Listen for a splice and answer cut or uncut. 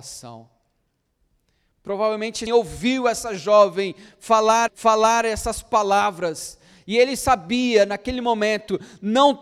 cut